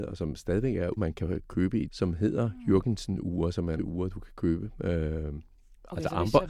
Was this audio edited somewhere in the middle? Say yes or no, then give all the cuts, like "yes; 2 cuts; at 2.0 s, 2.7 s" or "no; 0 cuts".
yes; 3 cuts; at 1.0 s, 1.9 s, 3.8 s